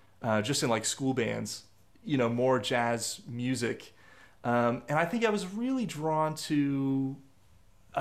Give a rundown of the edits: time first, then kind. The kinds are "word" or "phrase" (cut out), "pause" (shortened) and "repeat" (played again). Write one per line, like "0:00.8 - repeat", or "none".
none